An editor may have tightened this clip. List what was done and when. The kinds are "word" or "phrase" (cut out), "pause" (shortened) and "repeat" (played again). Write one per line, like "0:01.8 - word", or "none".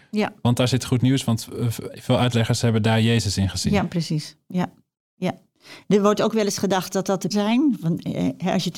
0:07.3 - word